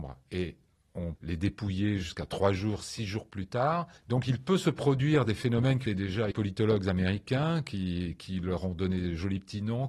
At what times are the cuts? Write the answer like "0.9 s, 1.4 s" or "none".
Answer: 1.2 s, 4.0 s, 5.9 s, 6.3 s